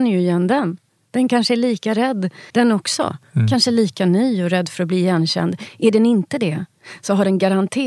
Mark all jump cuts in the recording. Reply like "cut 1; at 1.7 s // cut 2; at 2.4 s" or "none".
cut 1; at 2.5 s